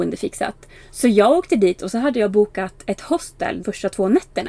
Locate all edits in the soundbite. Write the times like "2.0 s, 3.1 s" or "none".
3.6 s